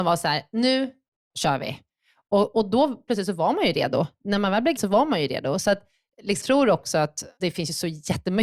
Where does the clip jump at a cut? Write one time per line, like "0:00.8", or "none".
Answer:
0:01.3
0:03.1
0:04.8
0:06.4
0:07.4

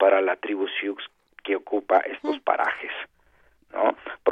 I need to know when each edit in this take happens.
none

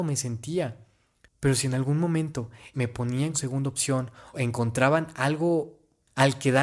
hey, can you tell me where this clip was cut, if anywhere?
0:02.7
0:03.3
0:04.3

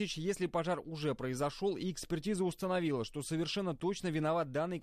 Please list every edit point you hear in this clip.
none

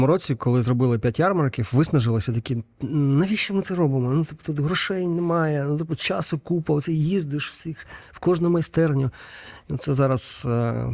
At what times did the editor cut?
none

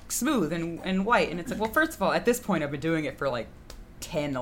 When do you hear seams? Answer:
none

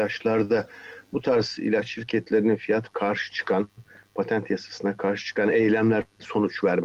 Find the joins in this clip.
0:02.9

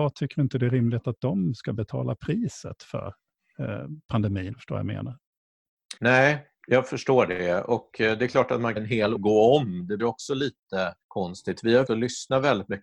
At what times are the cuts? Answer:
0:04.5
0:06.0
0:08.8
0:09.2
0:10.0
0:11.0
0:11.9

